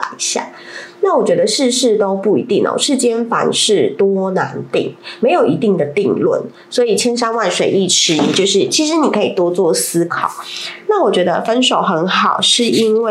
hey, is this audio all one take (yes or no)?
yes